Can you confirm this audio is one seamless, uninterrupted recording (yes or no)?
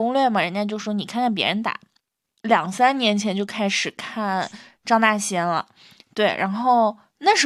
yes